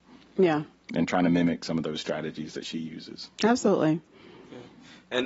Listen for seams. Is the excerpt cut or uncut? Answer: uncut